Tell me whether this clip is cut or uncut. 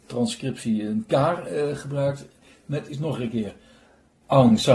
uncut